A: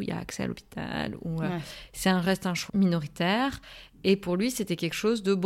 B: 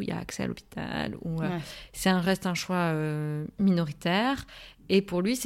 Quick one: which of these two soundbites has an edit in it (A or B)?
A